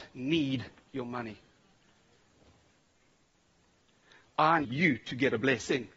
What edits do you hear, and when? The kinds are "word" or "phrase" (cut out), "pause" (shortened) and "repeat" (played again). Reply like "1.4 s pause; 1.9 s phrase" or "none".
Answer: 4.6 s word